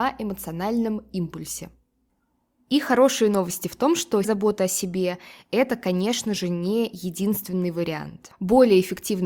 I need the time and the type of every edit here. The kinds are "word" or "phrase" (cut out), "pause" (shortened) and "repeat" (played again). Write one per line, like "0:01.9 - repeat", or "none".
0:04.2 - word

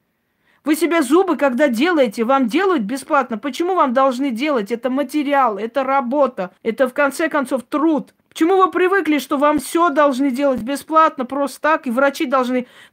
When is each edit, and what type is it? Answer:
0:06.6 - pause
0:08.2 - pause

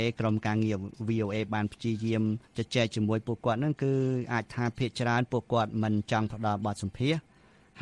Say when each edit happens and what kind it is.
0:02.4 - pause

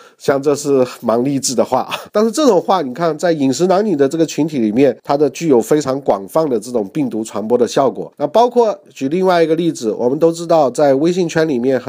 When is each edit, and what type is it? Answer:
0:02.1 - pause
0:05.0 - pause
0:08.1 - pause

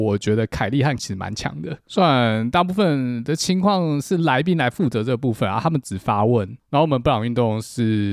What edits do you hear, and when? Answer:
0:01.0 - word

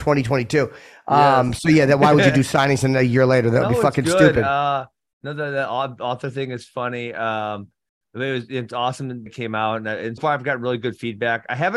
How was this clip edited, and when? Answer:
0:09.3 - word
0:10.2 - word

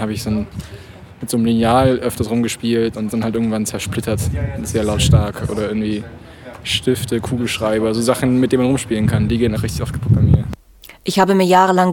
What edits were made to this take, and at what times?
0:03.1 - word
0:09.6 - word

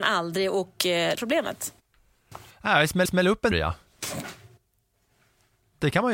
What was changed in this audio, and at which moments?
0:01.1 - word
0:03.0 - repeat
0:03.5 - word

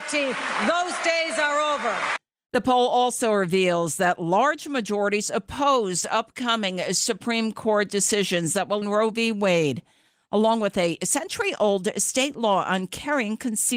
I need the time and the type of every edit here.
0:08.8 - phrase

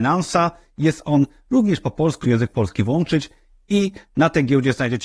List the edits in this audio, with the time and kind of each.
0:02.2 - phrase

